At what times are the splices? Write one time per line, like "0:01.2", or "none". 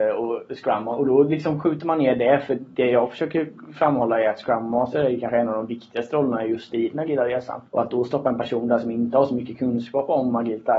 0:07.7